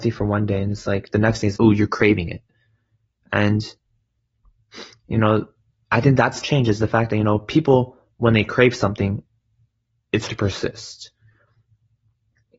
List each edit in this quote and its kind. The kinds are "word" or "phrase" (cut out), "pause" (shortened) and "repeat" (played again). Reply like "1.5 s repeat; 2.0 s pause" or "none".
1.6 s word; 6.4 s phrase; 10.3 s word